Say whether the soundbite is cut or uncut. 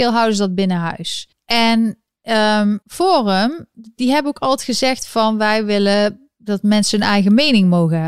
cut